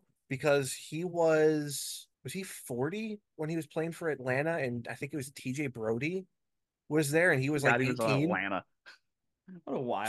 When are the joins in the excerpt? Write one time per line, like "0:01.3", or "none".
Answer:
0:02.1